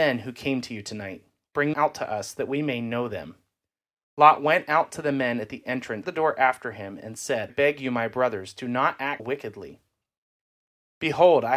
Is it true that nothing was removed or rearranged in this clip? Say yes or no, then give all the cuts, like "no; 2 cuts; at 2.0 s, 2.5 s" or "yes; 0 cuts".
no; 4 cuts; at 1.7 s, 6.0 s, 7.5 s, 9.2 s